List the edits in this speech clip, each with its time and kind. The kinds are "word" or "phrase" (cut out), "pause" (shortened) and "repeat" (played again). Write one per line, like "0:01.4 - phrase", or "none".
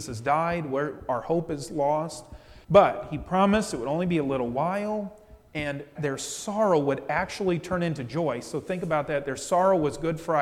0:02.6 - pause
0:06.0 - phrase